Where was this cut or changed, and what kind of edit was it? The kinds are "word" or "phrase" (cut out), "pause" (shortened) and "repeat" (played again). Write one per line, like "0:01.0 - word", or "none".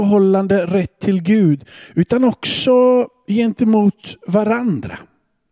none